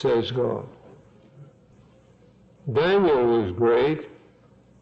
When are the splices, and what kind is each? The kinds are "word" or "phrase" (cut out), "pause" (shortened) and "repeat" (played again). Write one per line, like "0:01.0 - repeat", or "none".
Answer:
none